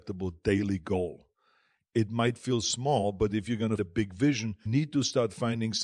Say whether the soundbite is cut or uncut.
cut